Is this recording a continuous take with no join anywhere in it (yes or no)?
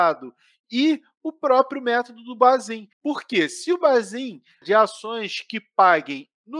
no